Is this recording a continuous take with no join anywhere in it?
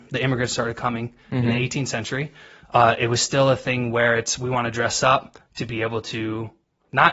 yes; 0 cuts

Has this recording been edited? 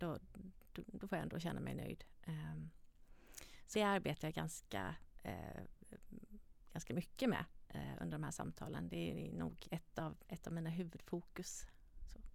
yes; 3 cuts; at 3.7 s, 9.6 s, 10.2 s

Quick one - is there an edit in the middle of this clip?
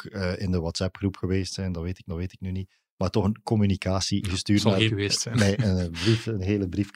yes; 2 cuts; at 2.1 s, 4.9 s

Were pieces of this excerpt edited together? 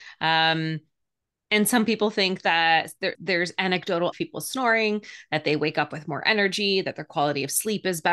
yes; 2 cuts; at 3.1 s, 4.1 s

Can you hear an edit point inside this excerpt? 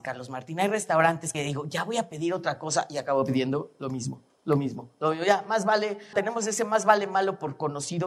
yes; 2 cuts; at 1.3 s, 6.1 s

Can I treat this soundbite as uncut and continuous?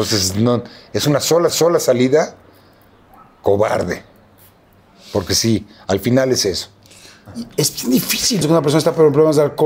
no; 2 cuts; at 1.5 s, 8.4 s

